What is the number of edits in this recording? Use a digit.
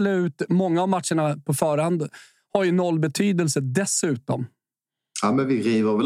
0